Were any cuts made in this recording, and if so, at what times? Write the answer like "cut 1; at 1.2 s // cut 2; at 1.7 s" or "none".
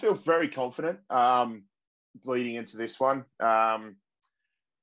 none